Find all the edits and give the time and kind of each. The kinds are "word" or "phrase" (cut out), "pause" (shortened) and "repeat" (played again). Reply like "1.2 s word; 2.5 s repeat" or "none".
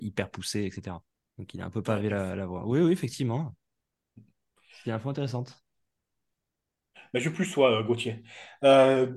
1.1 s pause